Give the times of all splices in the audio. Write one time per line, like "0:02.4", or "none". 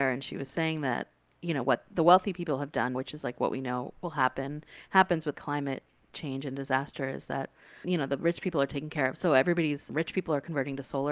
0:02.9
0:05.3
0:07.8
0:09.9